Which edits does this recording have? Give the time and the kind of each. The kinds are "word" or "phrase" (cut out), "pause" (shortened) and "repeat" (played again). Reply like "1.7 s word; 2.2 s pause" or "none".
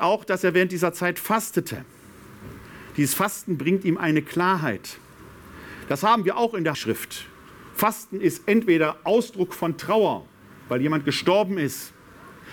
6.7 s word

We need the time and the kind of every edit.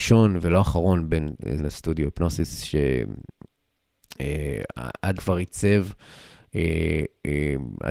1.6 s word; 5.2 s word

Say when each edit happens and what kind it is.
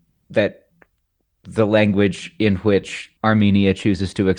3.2 s pause

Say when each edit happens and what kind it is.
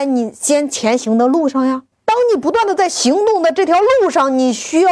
1.9 s pause

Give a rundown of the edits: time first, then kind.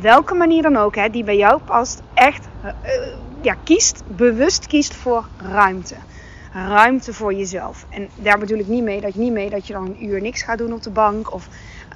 9.1 s repeat

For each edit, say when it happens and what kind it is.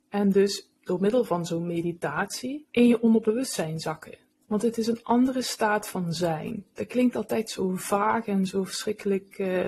2.7 s pause; 4.3 s pause

